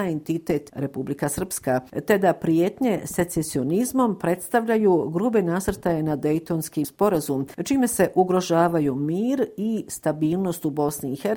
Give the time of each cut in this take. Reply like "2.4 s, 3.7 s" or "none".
6.8 s